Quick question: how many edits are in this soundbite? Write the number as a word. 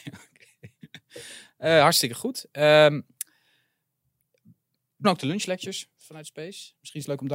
one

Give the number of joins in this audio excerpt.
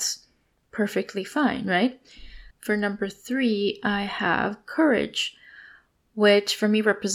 one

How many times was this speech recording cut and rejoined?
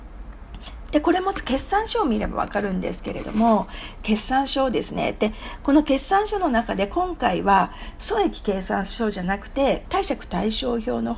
one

